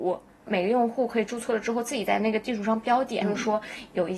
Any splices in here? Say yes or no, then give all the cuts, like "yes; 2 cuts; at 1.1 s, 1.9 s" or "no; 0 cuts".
yes; 1 cut; at 3.2 s